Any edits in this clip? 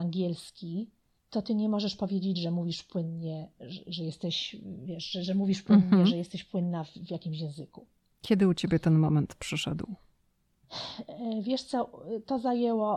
no; 0 cuts

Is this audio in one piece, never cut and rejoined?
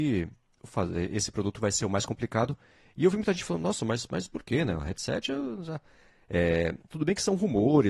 yes; 0 cuts

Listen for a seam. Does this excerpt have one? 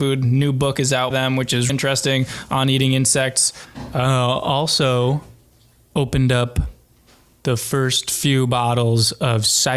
yes; 2 cuts; at 1.1 s, 1.7 s

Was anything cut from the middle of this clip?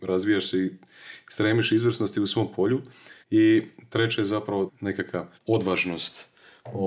yes; 3 cuts; at 3.2 s, 4.7 s, 5.3 s

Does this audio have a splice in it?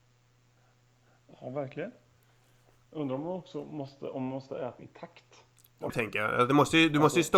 yes; 2 cuts; at 4.8 s, 5.9 s

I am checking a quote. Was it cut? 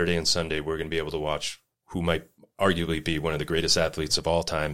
no; 0 cuts

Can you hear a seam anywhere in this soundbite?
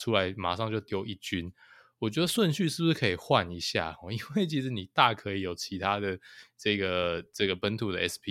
no; 0 cuts

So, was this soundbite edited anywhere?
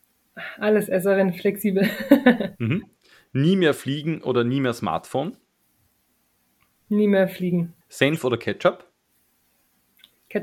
yes; 1 cut; at 7.8 s

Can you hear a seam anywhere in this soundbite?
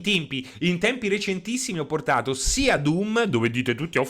no; 0 cuts

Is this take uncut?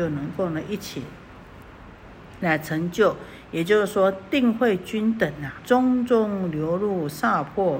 no; 1 cut; at 5.6 s

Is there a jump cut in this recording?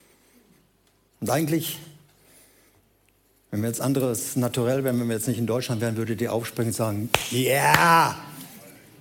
no; 0 cuts

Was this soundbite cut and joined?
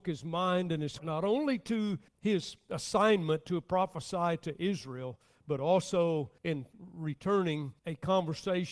yes; 4 cuts; at 1.0 s, 2.1 s, 6.4 s, 7.8 s

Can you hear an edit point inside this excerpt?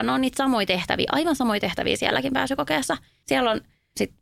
no; 0 cuts

